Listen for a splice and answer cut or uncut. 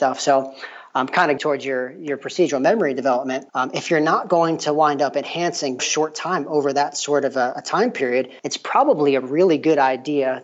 cut